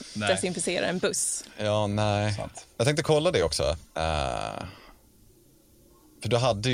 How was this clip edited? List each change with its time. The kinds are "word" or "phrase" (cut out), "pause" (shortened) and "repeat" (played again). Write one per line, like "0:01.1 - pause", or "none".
none